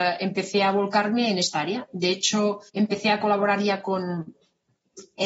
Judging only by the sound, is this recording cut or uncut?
cut